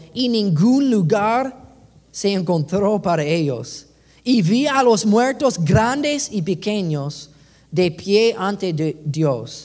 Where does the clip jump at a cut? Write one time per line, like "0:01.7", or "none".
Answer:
none